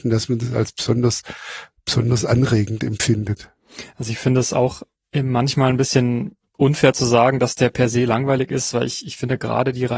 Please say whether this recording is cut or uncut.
uncut